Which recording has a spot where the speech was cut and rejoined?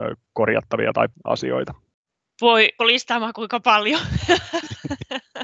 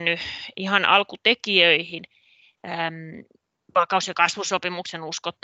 first; 2 cuts; at 1.1 s, 2.8 s

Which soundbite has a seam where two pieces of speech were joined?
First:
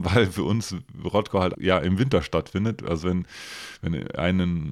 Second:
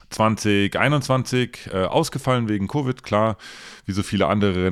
first; 1 cut; at 1.5 s

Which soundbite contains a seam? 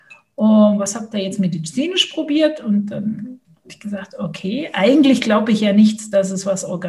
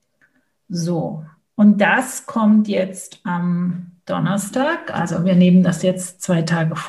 first; 1 cut; at 3.4 s

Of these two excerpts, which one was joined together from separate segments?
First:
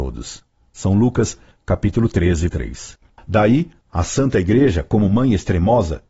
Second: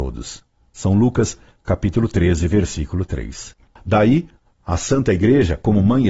first; 2 cuts; at 2.5 s, 3.8 s

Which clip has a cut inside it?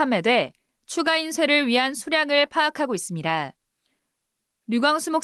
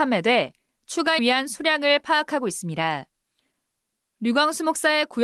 second; 1 cut; at 1.2 s

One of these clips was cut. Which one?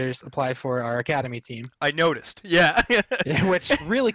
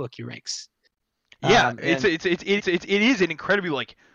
second; 1 cut; at 2.6 s

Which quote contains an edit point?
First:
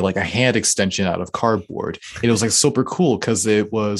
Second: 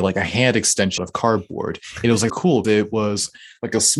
second; 3 cuts; at 1.0 s, 2.3 s, 2.6 s

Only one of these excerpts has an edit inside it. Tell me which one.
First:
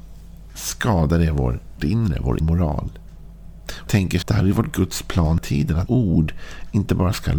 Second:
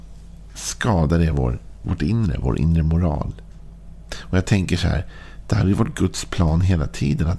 first; 6 cuts; at 1.8 s, 2.4 s, 3.9 s, 4.2 s, 5.4 s, 5.9 s

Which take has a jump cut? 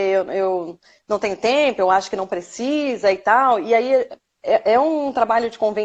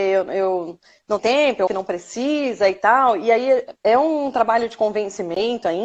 second; 3 cuts; at 1.2 s, 1.7 s, 3.8 s

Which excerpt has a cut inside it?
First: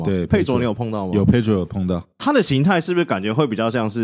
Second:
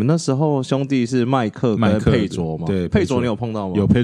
first; 1 cut; at 2.1 s

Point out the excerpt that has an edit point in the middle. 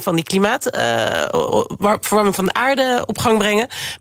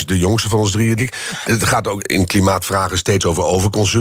second; 3 cuts; at 1.0 s, 1.4 s, 2.0 s

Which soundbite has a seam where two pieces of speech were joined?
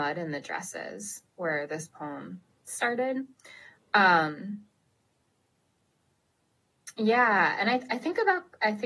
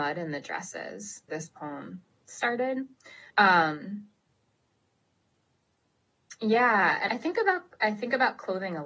second; 3 cuts; at 1.3 s, 3.3 s, 7.1 s

